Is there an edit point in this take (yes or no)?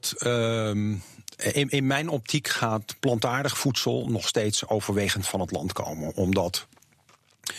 no